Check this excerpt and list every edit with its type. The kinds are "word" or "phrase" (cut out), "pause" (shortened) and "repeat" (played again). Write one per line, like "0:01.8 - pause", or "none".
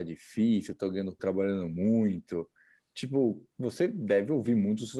0:01.2 - word
0:03.5 - pause